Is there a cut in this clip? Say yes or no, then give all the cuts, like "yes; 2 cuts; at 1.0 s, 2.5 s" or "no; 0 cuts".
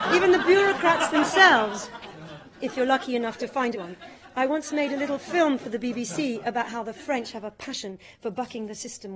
yes; 1 cut; at 3.7 s